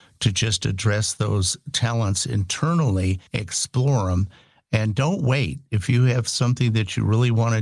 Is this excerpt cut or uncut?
cut